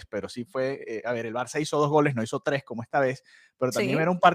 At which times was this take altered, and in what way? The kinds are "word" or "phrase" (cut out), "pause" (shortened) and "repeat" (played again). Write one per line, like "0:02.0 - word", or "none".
none